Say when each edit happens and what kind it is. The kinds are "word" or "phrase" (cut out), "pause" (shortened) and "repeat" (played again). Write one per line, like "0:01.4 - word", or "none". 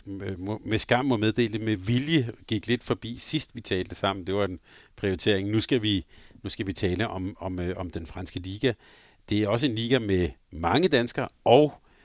none